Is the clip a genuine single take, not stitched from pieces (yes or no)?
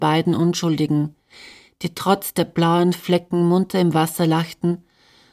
yes